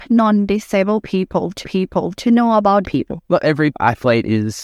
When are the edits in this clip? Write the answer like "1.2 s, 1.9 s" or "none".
1.6 s, 2.8 s, 3.2 s, 3.7 s